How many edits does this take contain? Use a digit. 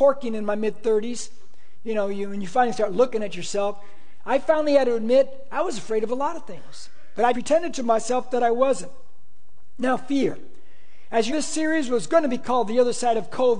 2